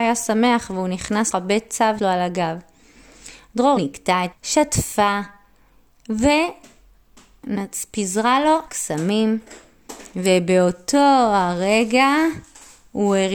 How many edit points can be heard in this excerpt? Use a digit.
5